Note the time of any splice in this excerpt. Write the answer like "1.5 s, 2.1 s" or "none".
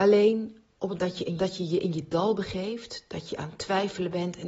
1.0 s, 1.4 s, 2.1 s